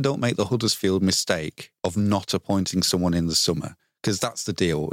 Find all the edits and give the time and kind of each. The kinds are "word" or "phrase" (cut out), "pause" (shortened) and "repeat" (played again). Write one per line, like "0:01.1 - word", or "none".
0:01.8 - pause